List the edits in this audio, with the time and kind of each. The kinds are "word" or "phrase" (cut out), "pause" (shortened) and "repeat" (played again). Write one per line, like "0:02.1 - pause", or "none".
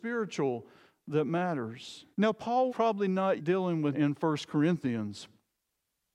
0:02.1 - pause
0:02.7 - word
0:03.4 - word
0:03.9 - word